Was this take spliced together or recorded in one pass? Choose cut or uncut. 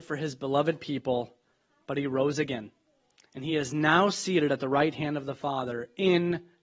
uncut